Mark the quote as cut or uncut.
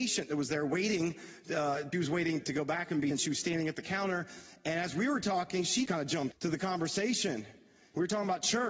cut